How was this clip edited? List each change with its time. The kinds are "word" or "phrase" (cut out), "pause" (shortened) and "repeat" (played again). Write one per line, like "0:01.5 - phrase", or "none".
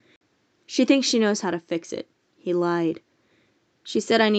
0:02.2 - pause